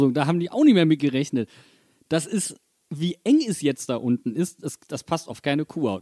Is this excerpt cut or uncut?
uncut